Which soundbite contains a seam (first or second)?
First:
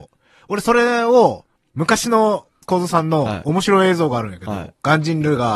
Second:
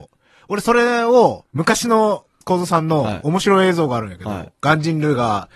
second